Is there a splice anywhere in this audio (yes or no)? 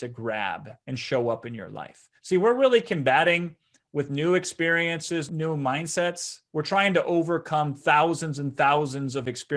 yes